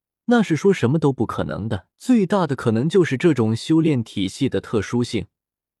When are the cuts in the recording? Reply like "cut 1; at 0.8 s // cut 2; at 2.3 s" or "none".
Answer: cut 1; at 1.9 s